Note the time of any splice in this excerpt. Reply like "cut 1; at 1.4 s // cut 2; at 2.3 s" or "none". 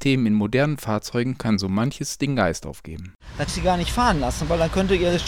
cut 1; at 3.5 s